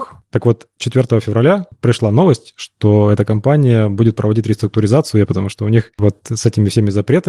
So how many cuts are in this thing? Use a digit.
1